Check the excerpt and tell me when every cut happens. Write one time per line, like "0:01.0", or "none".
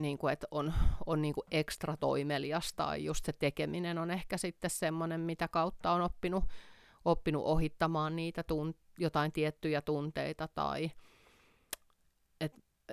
none

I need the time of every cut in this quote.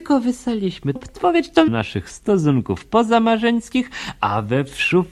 0:01.0
0:01.7

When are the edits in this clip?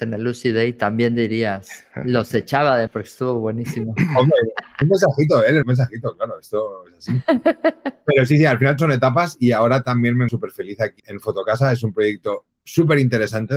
0:02.9
0:04.8
0:05.6
0:08.8
0:10.3
0:11.0

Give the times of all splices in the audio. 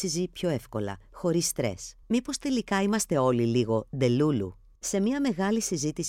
0:02.0
0:04.7

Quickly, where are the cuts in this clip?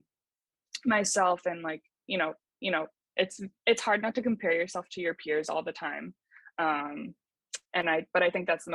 0:02.5
0:07.6

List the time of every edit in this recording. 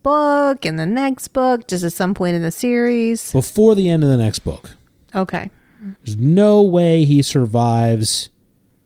0:06.0

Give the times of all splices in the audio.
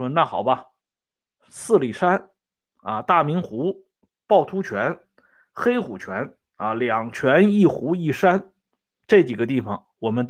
none

